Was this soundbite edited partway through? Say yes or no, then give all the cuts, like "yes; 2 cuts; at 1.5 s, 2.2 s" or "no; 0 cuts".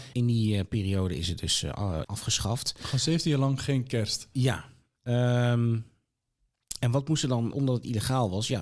yes; 2 cuts; at 2.0 s, 7.5 s